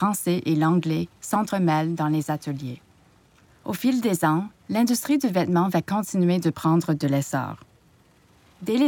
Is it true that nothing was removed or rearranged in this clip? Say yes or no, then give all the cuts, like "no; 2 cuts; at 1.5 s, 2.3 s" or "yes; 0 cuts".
yes; 0 cuts